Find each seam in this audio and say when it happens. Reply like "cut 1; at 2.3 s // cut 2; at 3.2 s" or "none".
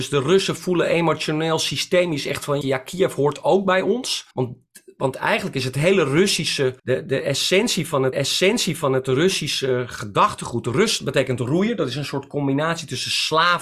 cut 1; at 2.6 s // cut 2; at 4.3 s // cut 3; at 6.8 s // cut 4; at 8.1 s